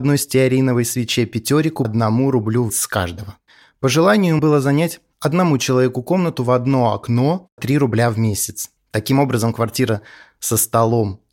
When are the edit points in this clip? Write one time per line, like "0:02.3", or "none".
0:01.8
0:02.7
0:04.4
0:07.6